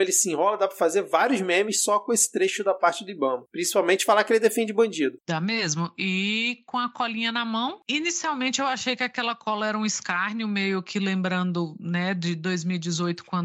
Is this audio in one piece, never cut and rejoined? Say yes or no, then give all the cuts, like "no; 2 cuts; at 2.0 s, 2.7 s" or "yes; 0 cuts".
yes; 0 cuts